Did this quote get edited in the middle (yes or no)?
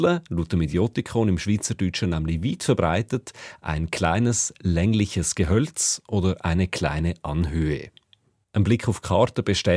no